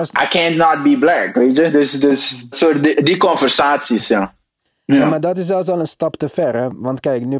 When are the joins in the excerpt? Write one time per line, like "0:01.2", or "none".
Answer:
0:02.5

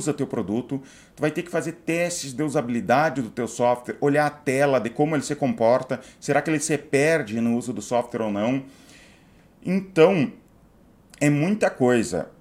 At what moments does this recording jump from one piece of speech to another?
none

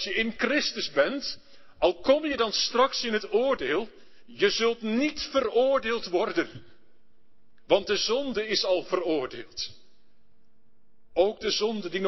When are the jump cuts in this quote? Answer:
none

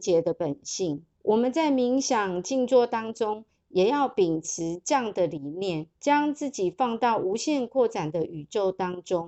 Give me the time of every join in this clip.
0:01.1
0:05.9

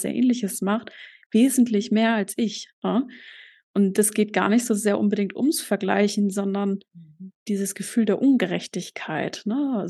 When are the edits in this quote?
0:02.7
0:07.4

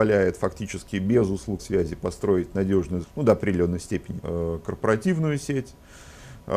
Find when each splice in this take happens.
0:01.6
0:03.0
0:04.2

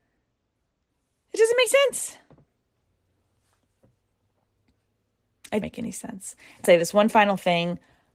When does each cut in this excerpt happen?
0:01.7
0:05.6
0:06.6

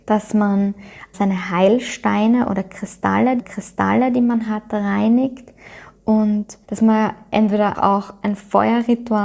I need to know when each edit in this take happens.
0:01.1
0:03.4
0:06.6
0:07.7

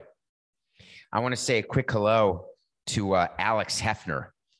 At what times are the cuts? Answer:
none

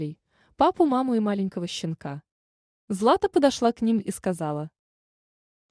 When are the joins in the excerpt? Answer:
none

